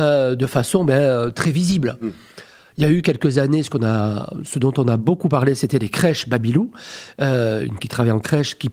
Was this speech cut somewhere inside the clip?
yes; 1 cut; at 7.8 s

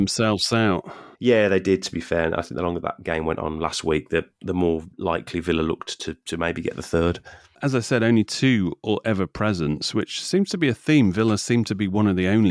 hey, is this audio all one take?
no; 2 cuts; at 1.1 s, 4.9 s

